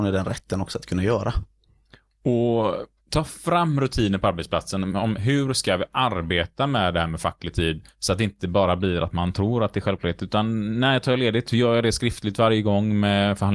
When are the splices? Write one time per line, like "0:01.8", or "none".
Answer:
0:03.0
0:07.9